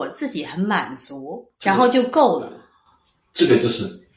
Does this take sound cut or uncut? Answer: uncut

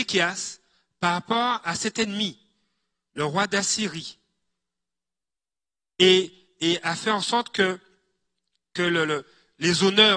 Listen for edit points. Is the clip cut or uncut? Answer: uncut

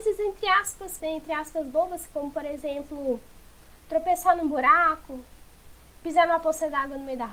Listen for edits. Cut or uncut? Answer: cut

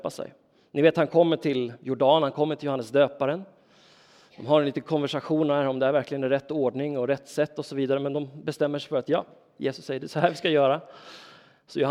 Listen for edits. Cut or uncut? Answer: uncut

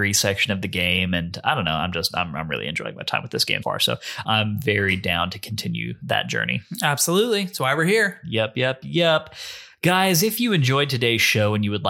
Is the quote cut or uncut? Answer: cut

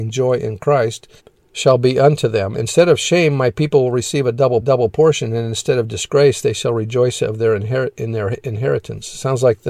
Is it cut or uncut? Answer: cut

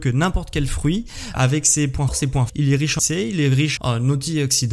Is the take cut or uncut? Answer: cut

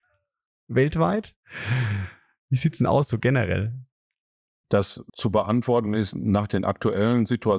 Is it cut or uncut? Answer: uncut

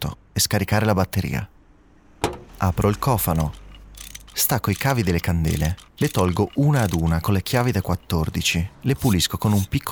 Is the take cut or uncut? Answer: cut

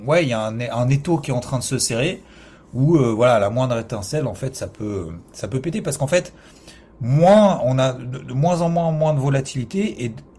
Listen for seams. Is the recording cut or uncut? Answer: uncut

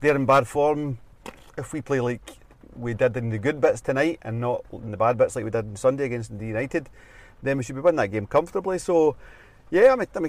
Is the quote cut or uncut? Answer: uncut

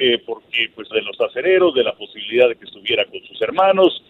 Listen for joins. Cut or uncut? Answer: cut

